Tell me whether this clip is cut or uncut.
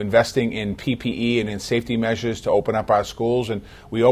cut